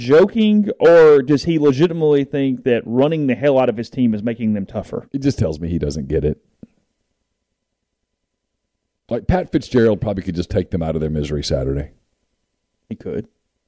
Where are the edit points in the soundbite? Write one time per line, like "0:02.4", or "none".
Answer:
none